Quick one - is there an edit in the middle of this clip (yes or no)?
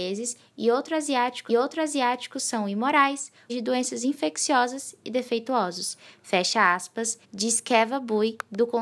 yes